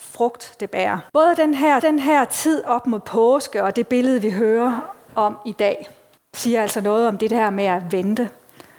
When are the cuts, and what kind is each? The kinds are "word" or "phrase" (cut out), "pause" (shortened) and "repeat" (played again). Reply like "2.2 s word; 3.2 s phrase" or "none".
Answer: 1.1 s pause; 1.8 s repeat; 6.2 s pause